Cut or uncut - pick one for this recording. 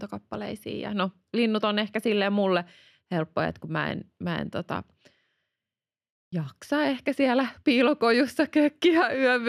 uncut